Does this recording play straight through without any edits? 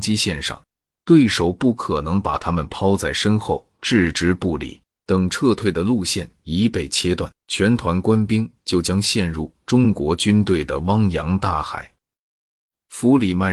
no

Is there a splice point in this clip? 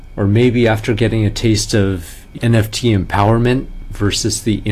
yes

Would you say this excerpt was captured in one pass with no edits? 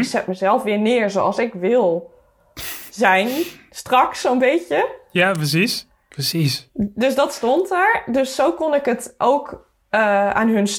yes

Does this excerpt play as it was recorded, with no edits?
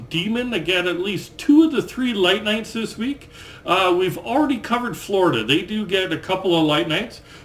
yes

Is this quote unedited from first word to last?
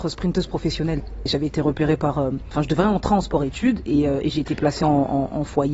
yes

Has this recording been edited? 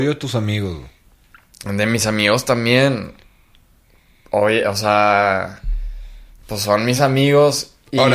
no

